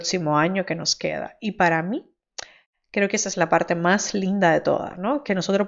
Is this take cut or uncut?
uncut